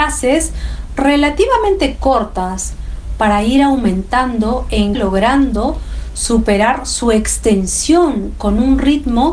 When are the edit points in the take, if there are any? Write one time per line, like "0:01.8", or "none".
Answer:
0:04.9